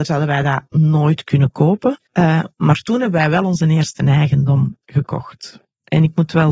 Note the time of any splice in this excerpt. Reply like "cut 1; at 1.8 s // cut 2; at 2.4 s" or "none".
cut 1; at 2.1 s

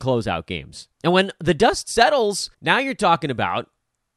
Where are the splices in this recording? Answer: cut 1; at 0.9 s // cut 2; at 2.5 s

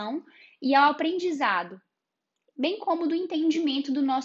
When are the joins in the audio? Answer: none

